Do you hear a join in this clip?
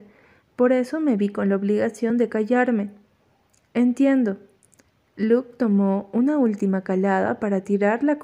no; 0 cuts

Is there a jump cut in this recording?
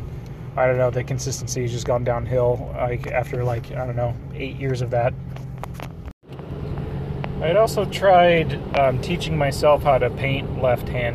no; 0 cuts

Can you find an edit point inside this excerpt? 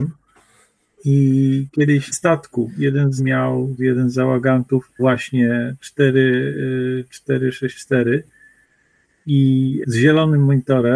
yes; 5 cuts; at 2.1 s, 3.2 s, 3.8 s, 5.0 s, 9.8 s

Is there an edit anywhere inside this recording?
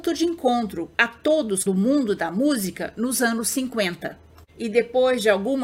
yes; 2 cuts; at 0.9 s, 1.7 s

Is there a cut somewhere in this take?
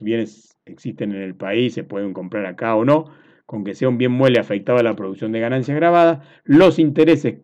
no; 0 cuts

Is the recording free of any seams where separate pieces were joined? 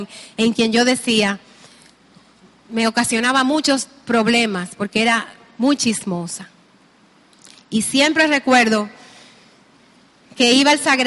yes; 0 cuts

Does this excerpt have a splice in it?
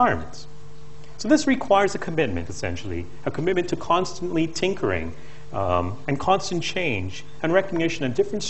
no; 0 cuts

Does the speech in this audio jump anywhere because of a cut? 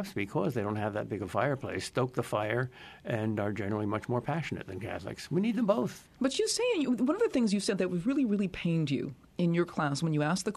no; 0 cuts

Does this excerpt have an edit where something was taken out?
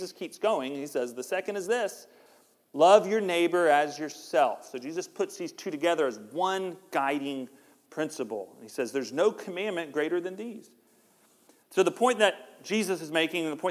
no; 0 cuts

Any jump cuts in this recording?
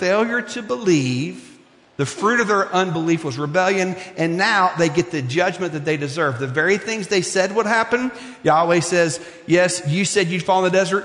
no; 0 cuts

